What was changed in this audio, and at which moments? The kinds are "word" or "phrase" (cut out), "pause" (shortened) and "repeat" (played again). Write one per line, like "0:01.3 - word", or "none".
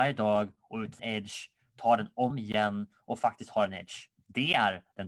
0:01.0 - word
0:02.3 - word